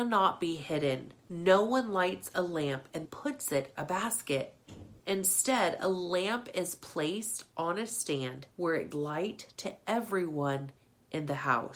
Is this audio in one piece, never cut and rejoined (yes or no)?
no